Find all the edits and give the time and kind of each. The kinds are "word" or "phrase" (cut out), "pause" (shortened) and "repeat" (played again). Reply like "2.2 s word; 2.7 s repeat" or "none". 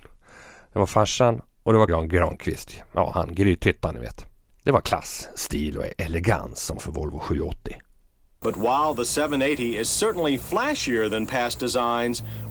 1.9 s word; 6.8 s word